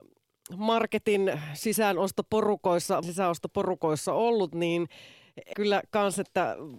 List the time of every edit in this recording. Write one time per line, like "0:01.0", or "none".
0:03.0
0:05.5